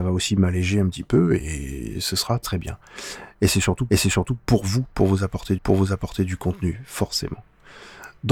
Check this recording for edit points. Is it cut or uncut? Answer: cut